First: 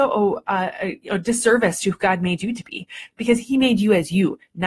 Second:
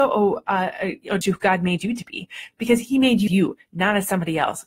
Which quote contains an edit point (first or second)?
second